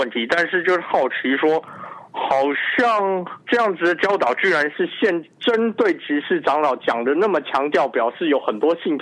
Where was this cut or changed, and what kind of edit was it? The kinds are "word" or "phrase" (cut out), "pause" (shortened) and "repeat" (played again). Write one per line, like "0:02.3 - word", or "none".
0:03.4 - pause
0:05.3 - pause

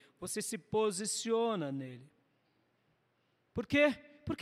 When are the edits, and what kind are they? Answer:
none

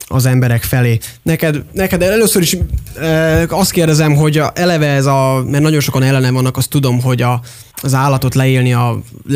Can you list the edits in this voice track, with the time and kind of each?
0:07.7 - pause

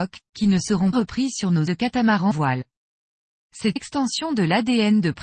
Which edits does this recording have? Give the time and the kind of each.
0:00.9 - word
0:01.7 - phrase
0:02.3 - word
0:03.8 - word

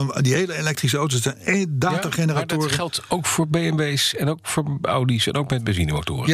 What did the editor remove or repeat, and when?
none

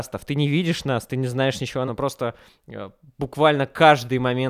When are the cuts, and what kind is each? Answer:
0:01.9 - word

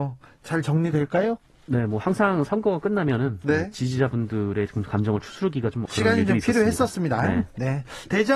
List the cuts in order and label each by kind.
0:05.9 - word

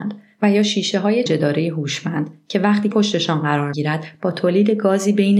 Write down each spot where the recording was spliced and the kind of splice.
0:01.3 - word
0:02.9 - word
0:03.7 - word

